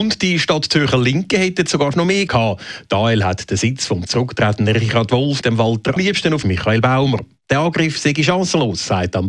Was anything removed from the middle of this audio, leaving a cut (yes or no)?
yes